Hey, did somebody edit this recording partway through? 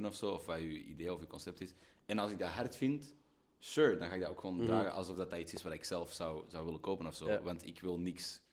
no; 0 cuts

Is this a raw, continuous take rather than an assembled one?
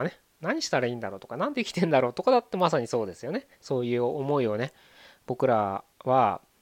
no; 1 cut; at 3.5 s

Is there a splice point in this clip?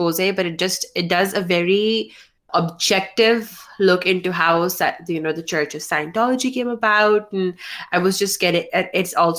no; 0 cuts

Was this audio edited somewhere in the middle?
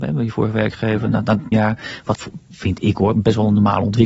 yes; 2 cuts; at 1.5 s, 2.1 s

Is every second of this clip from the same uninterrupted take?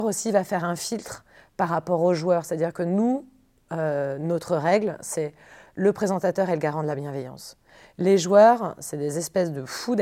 yes; 0 cuts

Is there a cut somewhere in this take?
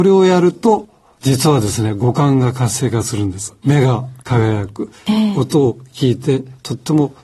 yes; 1 cut; at 4.2 s

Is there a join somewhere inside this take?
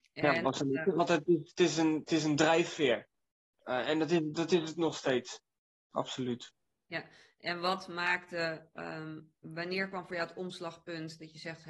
no; 0 cuts

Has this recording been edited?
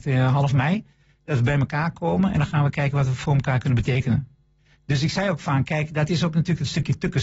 no; 0 cuts

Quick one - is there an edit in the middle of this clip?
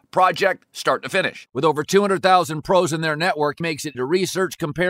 yes; 2 cuts; at 3.6 s, 3.9 s

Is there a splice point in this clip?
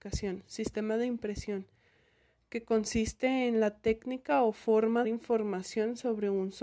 yes; 1 cut; at 5.0 s

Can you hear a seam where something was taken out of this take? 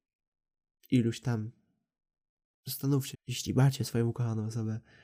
yes; 1 cut; at 3.1 s

